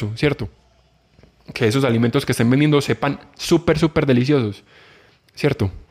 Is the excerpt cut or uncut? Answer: uncut